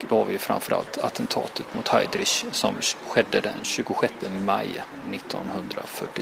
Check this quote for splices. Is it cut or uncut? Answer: uncut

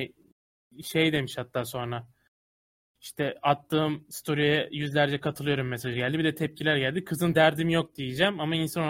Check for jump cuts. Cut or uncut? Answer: cut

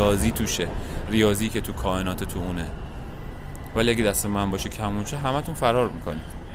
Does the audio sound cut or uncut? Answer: uncut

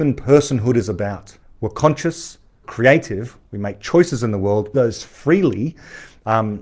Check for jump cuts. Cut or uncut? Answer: cut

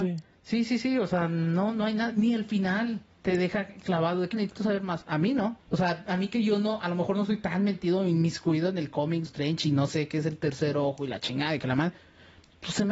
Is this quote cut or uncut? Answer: cut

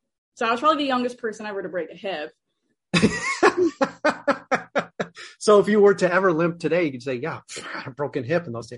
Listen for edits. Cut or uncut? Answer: uncut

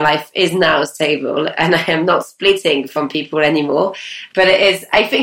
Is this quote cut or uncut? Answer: uncut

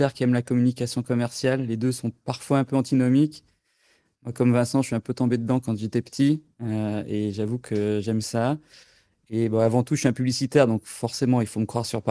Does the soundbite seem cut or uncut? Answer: uncut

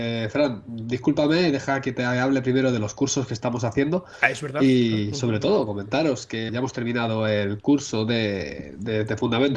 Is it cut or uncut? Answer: cut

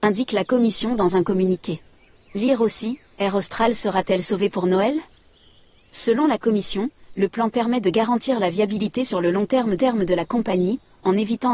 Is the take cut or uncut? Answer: cut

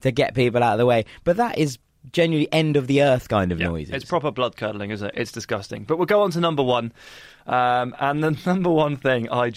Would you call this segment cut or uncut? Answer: uncut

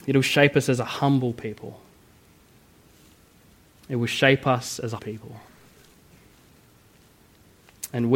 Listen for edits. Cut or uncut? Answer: cut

